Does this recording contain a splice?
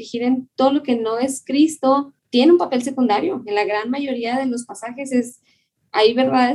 yes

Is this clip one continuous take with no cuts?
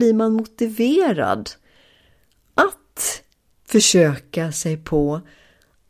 yes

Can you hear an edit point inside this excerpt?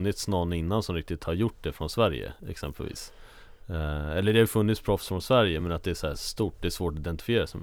no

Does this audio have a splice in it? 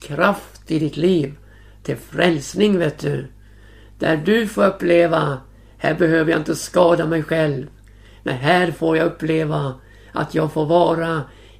no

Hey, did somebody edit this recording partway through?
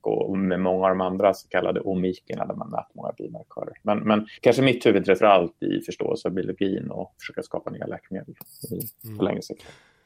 yes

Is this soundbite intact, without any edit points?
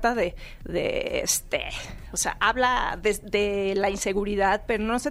yes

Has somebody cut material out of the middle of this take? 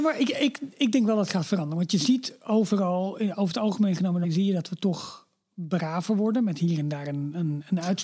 yes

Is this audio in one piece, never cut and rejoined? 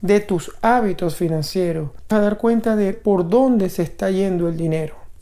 no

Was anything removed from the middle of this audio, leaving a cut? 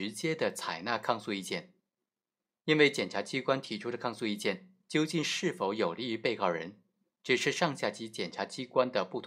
no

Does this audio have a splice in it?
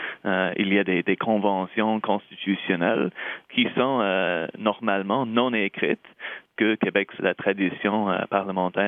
yes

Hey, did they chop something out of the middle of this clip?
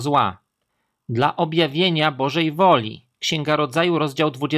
no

